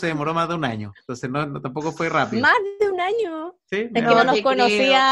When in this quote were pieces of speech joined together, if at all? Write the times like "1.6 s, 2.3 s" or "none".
1.0 s